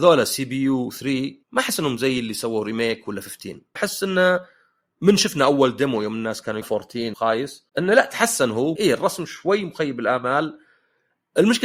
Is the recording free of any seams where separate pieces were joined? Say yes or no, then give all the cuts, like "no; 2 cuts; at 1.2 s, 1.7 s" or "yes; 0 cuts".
no; 6 cuts; at 1.4 s, 3.8 s, 6.6 s, 7.1 s, 7.7 s, 8.8 s